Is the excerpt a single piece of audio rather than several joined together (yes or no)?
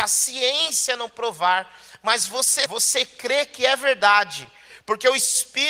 no